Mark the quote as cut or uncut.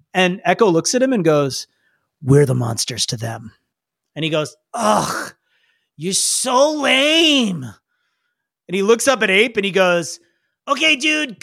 uncut